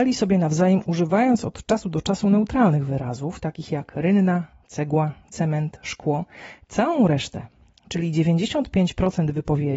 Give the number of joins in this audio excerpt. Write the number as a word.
zero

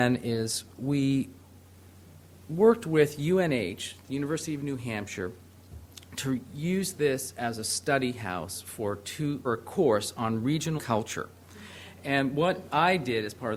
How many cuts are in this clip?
two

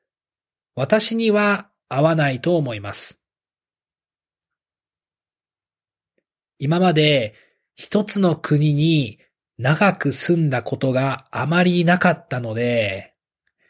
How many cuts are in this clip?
zero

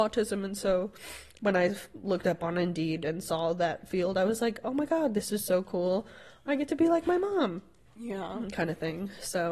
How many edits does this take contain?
zero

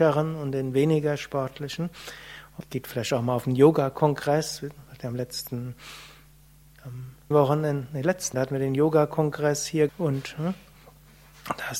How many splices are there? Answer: four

